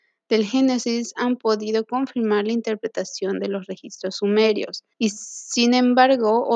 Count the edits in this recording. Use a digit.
1